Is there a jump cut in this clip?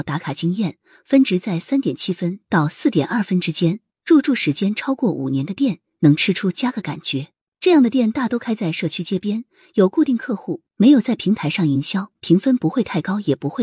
no; 0 cuts

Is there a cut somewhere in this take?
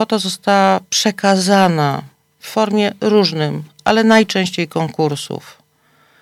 no; 0 cuts

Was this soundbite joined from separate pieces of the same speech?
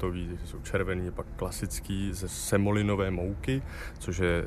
no; 0 cuts

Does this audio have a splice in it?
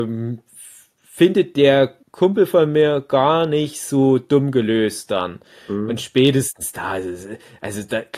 yes; 1 cut; at 2.0 s

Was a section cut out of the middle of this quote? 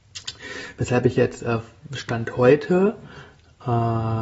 no; 0 cuts

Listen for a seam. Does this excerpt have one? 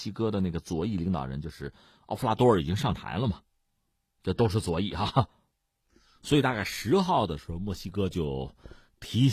no; 0 cuts

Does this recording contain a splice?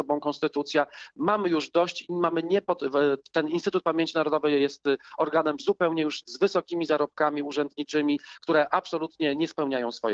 yes; 1 cut; at 6.2 s

